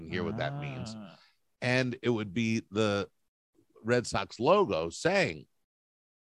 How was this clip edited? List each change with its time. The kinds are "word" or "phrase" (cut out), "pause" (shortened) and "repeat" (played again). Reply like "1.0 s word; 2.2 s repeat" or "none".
none